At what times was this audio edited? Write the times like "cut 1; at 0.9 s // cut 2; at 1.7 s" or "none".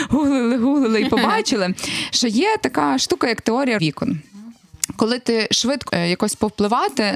cut 1; at 3.8 s // cut 2; at 5.9 s